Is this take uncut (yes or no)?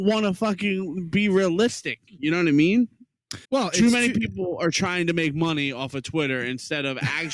no